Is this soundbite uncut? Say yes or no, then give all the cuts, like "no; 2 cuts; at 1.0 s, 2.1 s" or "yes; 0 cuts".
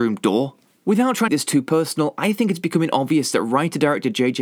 no; 1 cut; at 1.3 s